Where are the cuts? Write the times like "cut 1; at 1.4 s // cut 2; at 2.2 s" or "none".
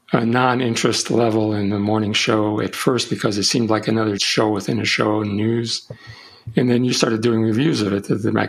cut 1; at 4.2 s